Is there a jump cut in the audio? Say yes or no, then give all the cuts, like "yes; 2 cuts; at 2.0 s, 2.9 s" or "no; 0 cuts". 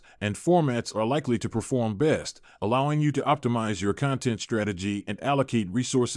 no; 0 cuts